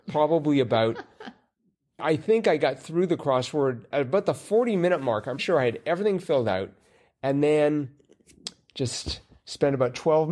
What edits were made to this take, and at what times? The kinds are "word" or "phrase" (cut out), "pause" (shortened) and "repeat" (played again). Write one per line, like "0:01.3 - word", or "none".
0:02.0 - word
0:03.9 - word
0:05.4 - word